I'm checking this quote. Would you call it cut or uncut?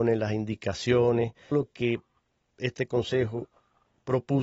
cut